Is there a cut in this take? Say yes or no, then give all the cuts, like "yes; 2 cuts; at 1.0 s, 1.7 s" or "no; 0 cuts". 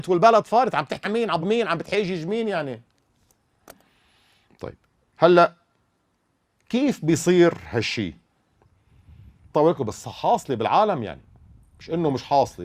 yes; 3 cuts; at 1.0 s, 1.4 s, 9.5 s